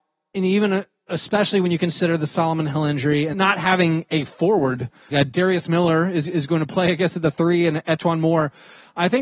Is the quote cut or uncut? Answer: cut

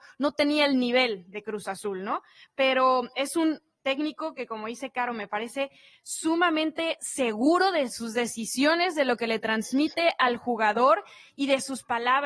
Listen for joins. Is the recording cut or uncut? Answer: uncut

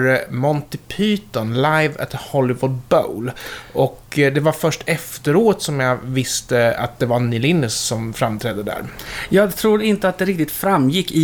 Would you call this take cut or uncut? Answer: uncut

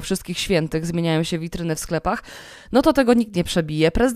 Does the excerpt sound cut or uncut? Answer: uncut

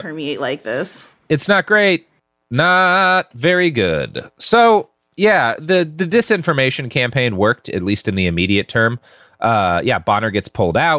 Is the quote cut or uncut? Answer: uncut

